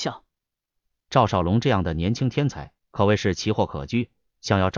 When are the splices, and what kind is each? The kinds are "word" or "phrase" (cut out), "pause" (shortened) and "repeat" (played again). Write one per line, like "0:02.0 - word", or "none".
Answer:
0:02.8 - pause